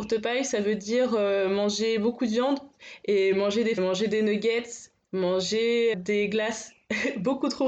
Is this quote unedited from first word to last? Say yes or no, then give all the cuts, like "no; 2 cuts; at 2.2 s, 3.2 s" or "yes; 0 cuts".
no; 2 cuts; at 3.8 s, 5.9 s